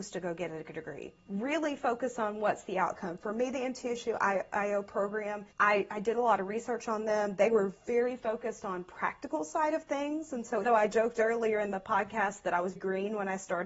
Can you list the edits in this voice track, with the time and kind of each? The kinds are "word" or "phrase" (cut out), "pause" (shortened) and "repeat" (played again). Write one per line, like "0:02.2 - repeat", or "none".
0:01.2 - pause
0:05.5 - pause
0:10.6 - word
0:12.8 - word